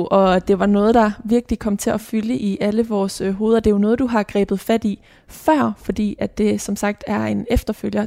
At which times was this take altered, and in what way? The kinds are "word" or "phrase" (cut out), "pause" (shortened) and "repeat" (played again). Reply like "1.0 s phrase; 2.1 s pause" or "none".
none